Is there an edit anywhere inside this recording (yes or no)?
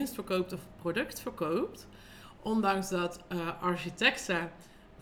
no